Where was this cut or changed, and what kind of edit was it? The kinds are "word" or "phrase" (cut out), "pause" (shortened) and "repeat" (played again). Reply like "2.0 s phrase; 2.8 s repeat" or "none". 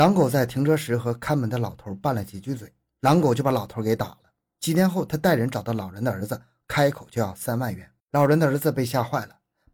8.0 s pause